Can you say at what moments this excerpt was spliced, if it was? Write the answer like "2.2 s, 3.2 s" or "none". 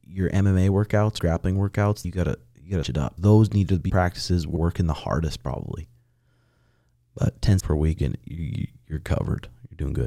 1.2 s, 2.0 s, 2.8 s, 3.2 s, 3.9 s, 4.6 s, 7.6 s, 8.0 s